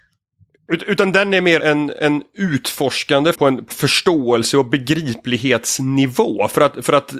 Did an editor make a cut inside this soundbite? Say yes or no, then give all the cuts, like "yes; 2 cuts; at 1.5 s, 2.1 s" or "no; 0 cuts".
yes; 3 cuts; at 1.6 s, 3.3 s, 3.7 s